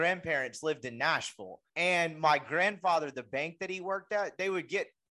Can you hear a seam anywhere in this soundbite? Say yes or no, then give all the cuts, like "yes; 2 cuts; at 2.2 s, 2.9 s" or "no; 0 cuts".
yes; 1 cut; at 1.7 s